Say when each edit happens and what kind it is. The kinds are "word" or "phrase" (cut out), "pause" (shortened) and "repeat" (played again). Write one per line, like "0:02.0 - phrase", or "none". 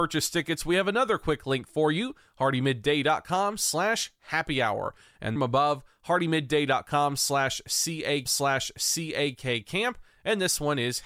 0:05.4 - phrase
0:08.3 - repeat